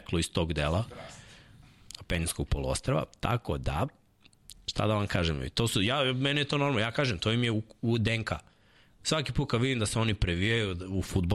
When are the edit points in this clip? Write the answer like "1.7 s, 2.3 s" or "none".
none